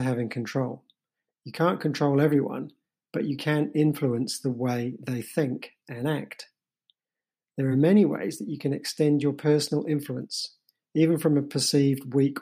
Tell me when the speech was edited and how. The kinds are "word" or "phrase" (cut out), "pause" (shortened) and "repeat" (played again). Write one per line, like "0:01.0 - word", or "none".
none